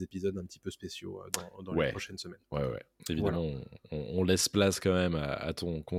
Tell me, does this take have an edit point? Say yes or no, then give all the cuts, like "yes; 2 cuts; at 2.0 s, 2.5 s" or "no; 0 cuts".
yes; 1 cut; at 2.4 s